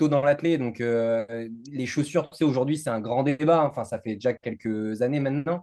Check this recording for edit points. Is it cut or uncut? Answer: uncut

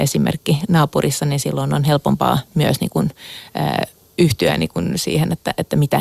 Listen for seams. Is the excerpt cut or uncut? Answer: uncut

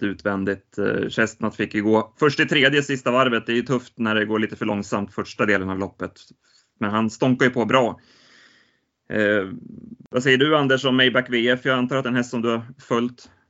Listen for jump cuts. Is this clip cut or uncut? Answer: uncut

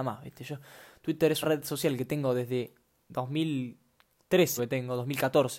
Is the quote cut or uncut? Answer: cut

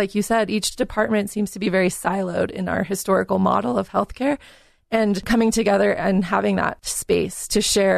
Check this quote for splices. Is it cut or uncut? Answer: uncut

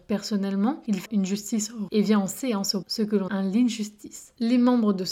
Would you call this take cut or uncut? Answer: cut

